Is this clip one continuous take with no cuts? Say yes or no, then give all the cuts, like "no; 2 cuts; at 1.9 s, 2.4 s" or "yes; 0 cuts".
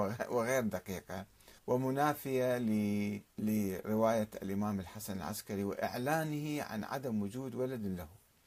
no; 2 cuts; at 1.6 s, 3.3 s